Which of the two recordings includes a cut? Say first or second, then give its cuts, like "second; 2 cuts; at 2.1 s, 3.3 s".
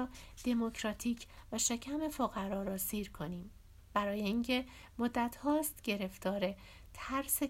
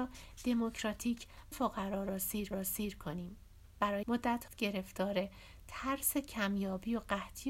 second; 4 cuts; at 1.5 s, 2.5 s, 4.0 s, 4.5 s